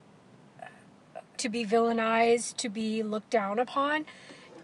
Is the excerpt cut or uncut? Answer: cut